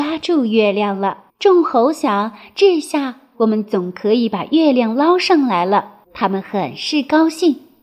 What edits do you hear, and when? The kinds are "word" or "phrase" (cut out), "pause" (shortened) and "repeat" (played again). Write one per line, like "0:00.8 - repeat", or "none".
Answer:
0:01.3 - pause
0:06.0 - pause